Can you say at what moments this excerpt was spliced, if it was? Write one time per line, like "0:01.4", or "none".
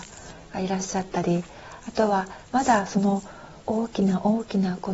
0:03.6